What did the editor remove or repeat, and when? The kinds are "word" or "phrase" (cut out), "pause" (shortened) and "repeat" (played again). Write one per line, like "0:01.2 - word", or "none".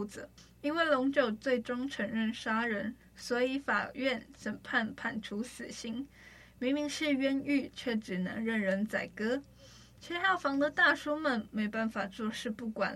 none